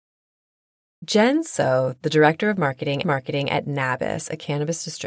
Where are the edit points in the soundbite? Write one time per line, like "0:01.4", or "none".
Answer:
0:03.0